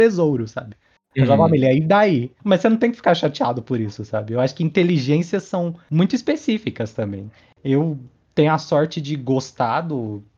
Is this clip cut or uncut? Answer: uncut